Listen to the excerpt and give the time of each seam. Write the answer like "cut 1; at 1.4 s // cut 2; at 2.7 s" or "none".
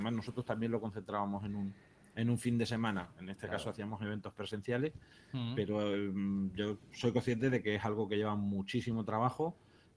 none